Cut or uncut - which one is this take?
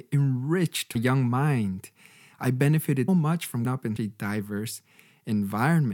cut